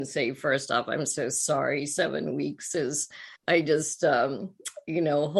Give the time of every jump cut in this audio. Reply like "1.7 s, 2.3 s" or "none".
3.4 s